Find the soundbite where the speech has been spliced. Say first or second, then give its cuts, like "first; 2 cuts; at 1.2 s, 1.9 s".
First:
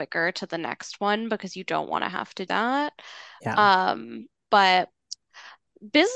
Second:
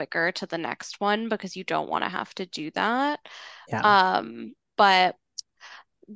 first; 1 cut; at 2.5 s